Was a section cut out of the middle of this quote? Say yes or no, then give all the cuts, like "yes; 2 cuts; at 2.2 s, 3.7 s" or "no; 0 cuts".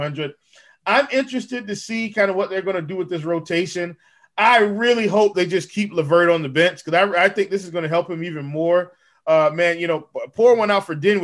no; 0 cuts